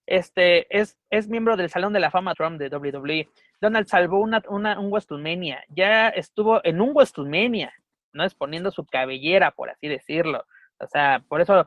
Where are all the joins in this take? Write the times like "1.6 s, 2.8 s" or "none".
2.3 s, 3.9 s